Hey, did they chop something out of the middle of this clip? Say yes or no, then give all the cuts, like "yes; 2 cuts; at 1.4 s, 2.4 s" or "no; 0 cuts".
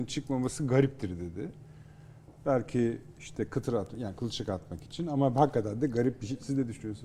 no; 0 cuts